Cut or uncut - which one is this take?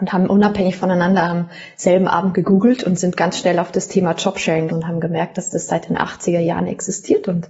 cut